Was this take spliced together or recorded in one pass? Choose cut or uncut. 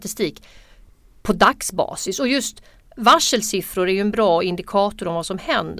uncut